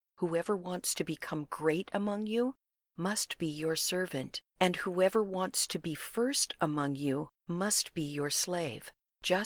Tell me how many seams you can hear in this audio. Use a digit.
1